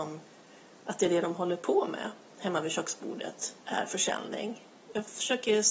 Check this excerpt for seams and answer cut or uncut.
cut